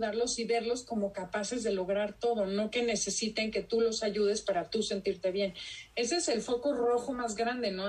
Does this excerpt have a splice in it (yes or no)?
no